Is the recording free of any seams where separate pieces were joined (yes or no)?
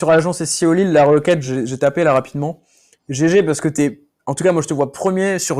yes